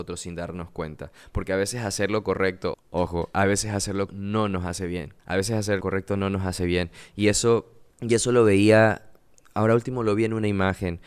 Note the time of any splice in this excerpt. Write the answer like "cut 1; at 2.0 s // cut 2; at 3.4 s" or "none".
cut 1; at 2.7 s // cut 2; at 4.1 s // cut 3; at 5.2 s // cut 4; at 5.8 s // cut 5; at 7.9 s